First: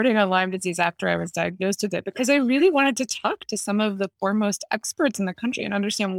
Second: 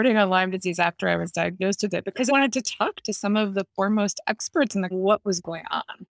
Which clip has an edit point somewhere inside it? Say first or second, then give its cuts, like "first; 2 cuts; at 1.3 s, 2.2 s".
second; 2 cuts; at 2.3 s, 4.9 s